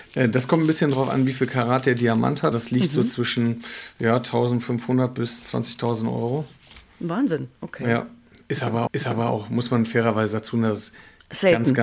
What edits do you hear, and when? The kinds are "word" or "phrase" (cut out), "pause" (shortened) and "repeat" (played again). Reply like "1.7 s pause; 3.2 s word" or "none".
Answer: 2.5 s word; 7.6 s pause; 8.9 s repeat